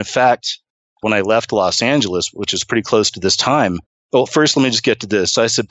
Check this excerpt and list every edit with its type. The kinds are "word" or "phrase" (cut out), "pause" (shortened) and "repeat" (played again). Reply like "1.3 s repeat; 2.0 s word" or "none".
3.9 s pause